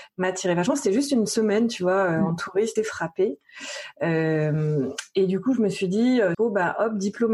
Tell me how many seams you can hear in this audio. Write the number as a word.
two